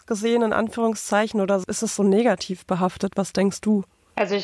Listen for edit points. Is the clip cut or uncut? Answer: uncut